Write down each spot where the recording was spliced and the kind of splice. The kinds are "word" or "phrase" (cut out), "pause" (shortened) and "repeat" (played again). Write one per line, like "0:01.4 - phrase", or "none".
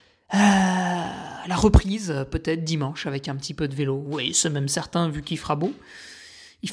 none